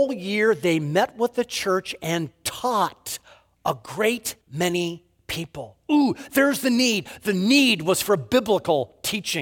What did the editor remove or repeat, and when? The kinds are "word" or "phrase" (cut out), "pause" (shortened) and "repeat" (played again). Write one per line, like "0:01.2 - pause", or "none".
0:04.4 - pause